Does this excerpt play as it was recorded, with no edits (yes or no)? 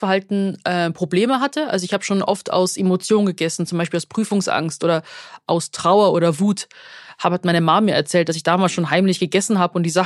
yes